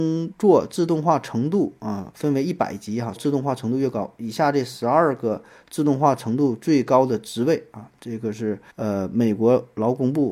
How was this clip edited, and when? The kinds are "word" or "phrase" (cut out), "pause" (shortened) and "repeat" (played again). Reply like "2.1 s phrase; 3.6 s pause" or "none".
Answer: 3.2 s phrase; 8.0 s pause; 8.7 s pause